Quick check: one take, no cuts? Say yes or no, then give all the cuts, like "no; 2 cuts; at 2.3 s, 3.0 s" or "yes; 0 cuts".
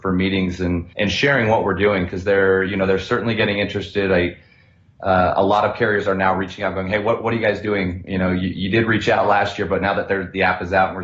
no; 1 cut; at 0.9 s